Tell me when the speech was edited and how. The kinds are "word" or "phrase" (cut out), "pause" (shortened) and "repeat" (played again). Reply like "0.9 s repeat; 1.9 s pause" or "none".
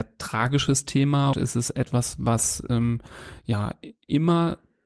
1.3 s word